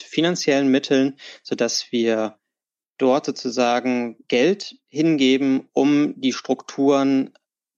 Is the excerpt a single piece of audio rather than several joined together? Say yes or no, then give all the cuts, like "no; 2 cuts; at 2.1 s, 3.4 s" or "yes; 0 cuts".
no; 1 cut; at 4.2 s